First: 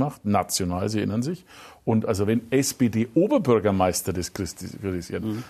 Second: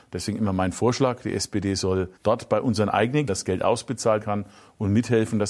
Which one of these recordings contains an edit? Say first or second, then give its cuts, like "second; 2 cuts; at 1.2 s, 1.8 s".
second; 3 cuts; at 2.2 s, 3.3 s, 4.2 s